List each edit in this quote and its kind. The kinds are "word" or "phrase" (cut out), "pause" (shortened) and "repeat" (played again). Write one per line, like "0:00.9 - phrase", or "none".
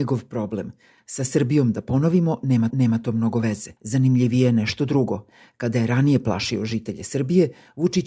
0:02.7 - repeat
0:03.8 - pause